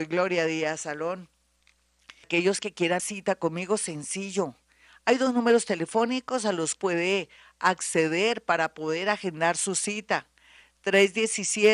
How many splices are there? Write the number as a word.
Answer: three